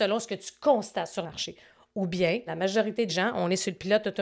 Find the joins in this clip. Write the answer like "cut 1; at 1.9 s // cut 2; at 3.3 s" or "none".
cut 1; at 1.2 s // cut 2; at 2.5 s // cut 3; at 3.1 s